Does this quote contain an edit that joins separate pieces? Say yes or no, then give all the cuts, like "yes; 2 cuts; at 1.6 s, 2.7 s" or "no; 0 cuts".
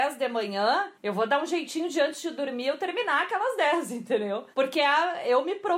yes; 2 cuts; at 0.9 s, 4.5 s